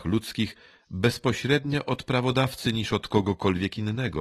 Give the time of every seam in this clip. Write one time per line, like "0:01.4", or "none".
none